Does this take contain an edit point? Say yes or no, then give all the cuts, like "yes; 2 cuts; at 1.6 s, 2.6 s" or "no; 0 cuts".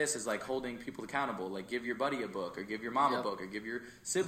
no; 0 cuts